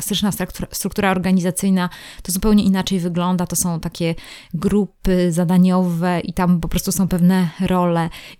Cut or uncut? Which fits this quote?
uncut